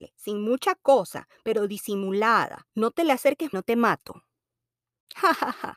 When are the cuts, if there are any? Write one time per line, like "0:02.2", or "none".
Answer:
0:02.7
0:03.5

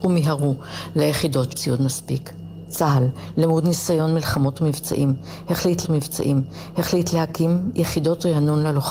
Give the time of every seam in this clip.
0:01.5
0:05.8

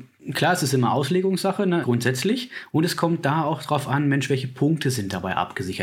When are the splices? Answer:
0:01.8

